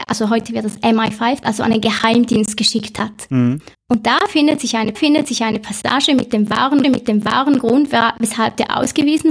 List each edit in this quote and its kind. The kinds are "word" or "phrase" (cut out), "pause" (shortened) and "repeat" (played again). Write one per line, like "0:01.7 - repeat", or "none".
0:01.4 - word
0:03.7 - pause
0:04.9 - repeat
0:06.8 - repeat